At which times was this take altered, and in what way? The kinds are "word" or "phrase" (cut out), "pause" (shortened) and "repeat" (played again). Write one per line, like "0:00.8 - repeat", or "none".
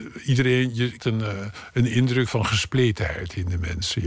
0:01.0 - word
0:02.3 - word